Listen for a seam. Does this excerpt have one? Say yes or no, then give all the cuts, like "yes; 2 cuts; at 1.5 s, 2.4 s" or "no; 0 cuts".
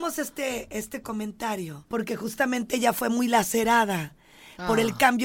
yes; 1 cut; at 1.9 s